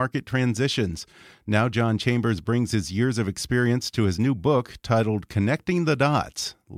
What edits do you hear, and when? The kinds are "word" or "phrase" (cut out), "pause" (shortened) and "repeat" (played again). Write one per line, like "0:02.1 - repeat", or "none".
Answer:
none